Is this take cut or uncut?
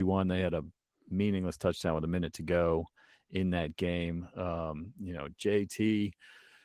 uncut